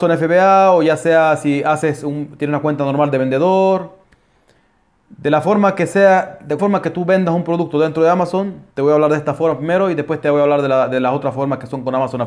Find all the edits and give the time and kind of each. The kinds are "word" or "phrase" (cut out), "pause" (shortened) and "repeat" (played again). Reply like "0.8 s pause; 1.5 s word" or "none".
6.6 s word; 8.7 s pause